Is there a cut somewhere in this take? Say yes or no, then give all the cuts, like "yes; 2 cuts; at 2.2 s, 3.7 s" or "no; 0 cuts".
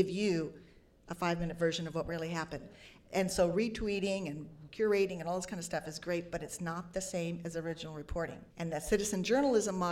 yes; 1 cut; at 8.5 s